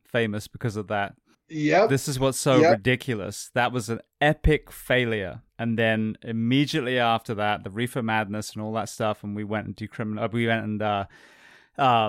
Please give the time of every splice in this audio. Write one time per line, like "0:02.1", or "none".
0:01.3
0:04.1
0:05.5